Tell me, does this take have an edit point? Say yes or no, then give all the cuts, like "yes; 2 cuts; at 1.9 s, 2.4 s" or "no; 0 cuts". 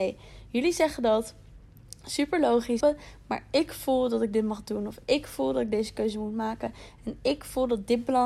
yes; 1 cut; at 2.8 s